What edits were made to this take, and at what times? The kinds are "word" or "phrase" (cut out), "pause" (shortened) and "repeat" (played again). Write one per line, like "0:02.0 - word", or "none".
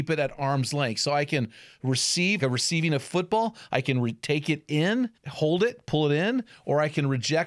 0:02.4 - word
0:05.2 - pause